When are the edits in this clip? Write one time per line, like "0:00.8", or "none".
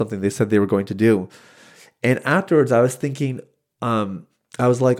none